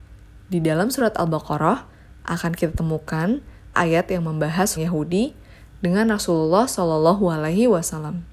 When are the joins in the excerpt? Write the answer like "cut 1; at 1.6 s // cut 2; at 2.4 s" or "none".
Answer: cut 1; at 3.7 s // cut 2; at 4.8 s